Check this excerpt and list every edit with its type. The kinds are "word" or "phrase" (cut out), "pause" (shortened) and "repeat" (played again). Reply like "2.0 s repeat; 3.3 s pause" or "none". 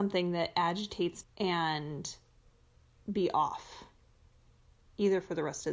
1.2 s word